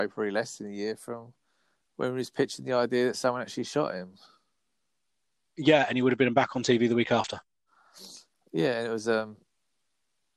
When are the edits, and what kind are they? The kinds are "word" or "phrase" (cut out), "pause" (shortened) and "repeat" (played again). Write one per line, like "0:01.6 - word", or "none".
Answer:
none